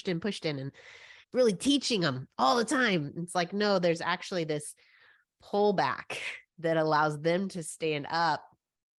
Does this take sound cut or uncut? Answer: cut